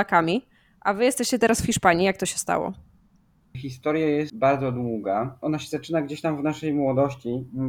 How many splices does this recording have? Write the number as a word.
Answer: zero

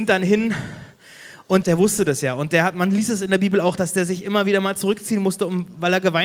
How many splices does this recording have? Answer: one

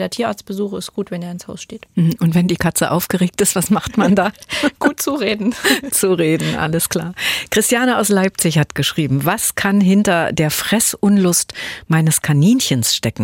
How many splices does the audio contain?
one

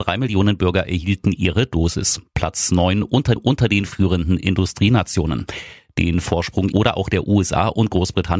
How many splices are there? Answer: two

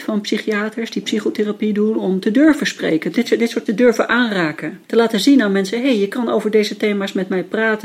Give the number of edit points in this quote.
three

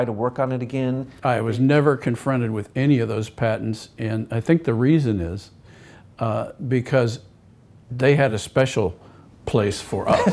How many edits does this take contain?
zero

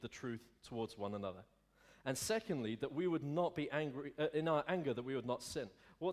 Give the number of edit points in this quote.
zero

